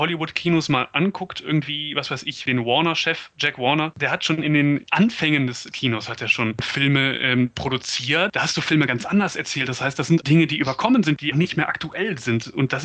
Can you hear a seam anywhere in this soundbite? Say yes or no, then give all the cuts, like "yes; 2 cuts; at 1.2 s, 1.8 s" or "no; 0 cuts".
yes; 2 cuts; at 10.2 s, 11.3 s